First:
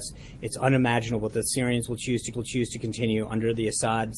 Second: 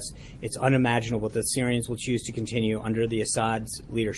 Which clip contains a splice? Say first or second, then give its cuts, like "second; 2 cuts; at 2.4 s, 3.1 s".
first; 1 cut; at 2.3 s